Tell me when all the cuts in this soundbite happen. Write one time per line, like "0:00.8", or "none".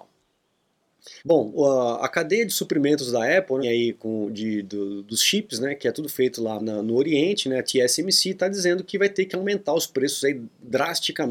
0:01.2
0:03.6
0:06.6